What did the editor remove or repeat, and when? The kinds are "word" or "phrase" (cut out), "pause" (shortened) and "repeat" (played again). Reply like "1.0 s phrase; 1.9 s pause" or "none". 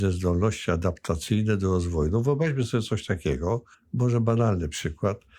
3.7 s pause